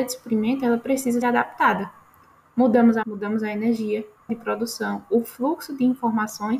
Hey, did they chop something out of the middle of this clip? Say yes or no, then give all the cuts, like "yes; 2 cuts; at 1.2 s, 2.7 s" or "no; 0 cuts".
yes; 3 cuts; at 1.2 s, 3.0 s, 4.3 s